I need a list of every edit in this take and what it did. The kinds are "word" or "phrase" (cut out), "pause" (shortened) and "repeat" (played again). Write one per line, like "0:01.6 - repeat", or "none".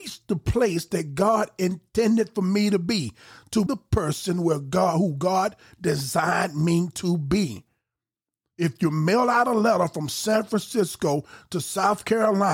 0:03.7 - word